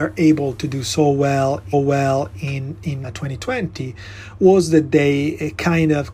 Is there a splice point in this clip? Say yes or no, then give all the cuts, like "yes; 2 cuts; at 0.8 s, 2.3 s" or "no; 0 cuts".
yes; 2 cuts; at 1.7 s, 3.0 s